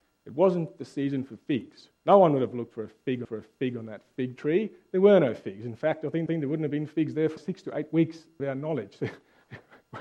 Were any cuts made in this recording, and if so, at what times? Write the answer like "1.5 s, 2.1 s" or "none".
2.0 s, 3.2 s, 6.3 s, 7.4 s, 8.4 s